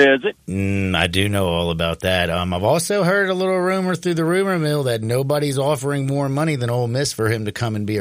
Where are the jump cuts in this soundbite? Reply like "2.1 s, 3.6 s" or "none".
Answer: none